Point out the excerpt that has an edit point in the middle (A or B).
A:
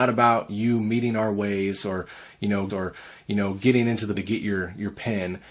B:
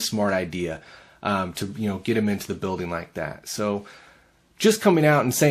A